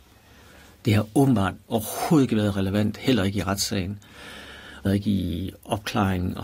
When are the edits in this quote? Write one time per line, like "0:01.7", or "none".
0:04.9